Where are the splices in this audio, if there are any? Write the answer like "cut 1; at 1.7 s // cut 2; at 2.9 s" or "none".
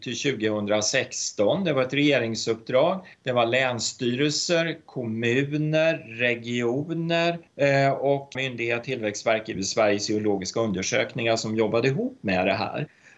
cut 1; at 3.1 s // cut 2; at 7.5 s // cut 3; at 8.3 s // cut 4; at 8.8 s // cut 5; at 9.5 s

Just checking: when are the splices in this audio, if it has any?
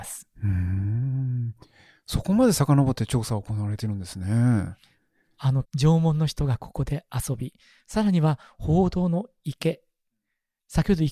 cut 1; at 5.6 s

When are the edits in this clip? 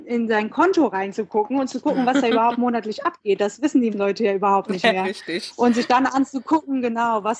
cut 1; at 3.9 s

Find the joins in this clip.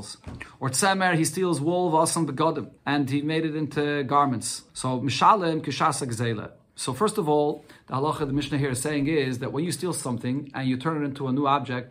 cut 1; at 2.8 s // cut 2; at 4.7 s

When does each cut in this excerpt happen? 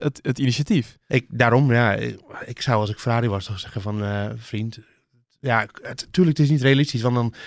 none

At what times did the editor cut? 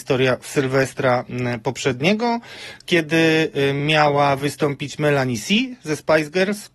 none

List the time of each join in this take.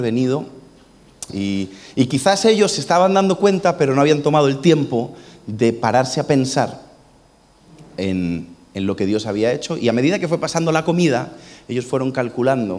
cut 1; at 1.3 s

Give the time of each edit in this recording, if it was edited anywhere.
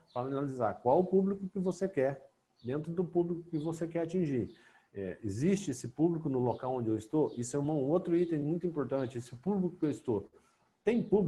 none

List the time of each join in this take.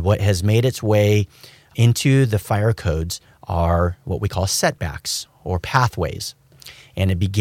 none

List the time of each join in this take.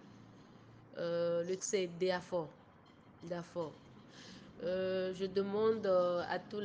cut 1; at 1.6 s

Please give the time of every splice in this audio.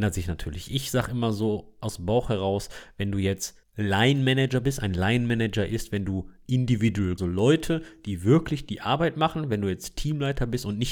cut 1; at 7.2 s

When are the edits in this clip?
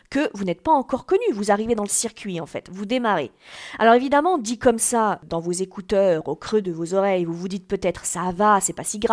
none

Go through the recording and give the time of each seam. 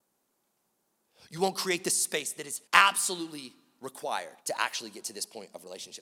cut 1; at 2.7 s // cut 2; at 4.4 s

